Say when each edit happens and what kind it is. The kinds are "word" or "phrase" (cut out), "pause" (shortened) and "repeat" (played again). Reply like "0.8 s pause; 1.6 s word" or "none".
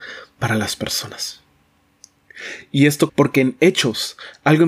3.1 s word